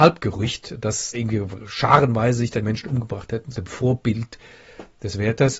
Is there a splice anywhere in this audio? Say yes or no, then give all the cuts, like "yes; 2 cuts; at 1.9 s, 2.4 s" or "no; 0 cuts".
yes; 3 cuts; at 1.1 s, 2.6 s, 3.5 s